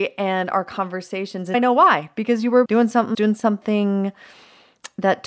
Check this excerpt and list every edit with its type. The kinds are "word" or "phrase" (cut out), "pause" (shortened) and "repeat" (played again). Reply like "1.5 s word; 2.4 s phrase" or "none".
1.5 s word; 2.6 s word; 3.1 s word